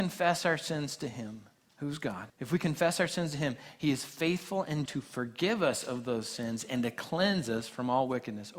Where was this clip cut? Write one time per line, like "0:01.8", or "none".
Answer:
0:01.5
0:02.3
0:04.9